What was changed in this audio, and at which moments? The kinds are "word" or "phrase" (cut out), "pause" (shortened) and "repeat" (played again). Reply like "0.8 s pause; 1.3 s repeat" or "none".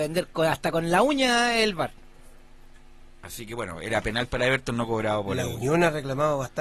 none